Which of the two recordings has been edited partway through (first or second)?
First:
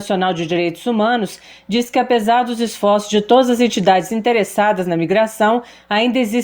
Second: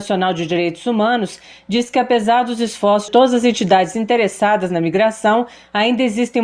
second